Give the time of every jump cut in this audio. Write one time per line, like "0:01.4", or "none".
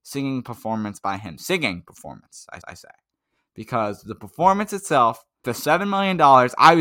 0:02.6
0:05.4